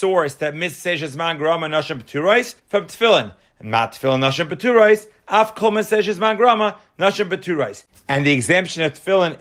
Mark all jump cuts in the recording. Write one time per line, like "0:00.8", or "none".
0:02.6